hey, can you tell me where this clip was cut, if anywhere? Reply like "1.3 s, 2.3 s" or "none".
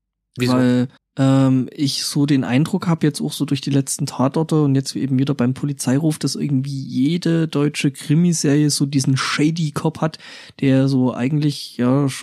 1.0 s